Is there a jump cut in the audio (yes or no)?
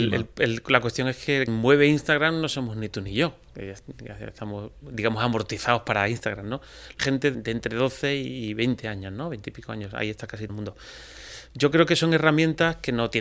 yes